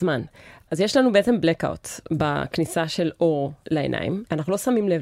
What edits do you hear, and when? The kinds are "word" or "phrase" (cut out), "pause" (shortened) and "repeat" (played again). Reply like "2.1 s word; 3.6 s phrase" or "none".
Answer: 3.6 s pause